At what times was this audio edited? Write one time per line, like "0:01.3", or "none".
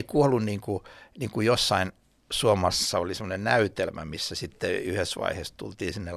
none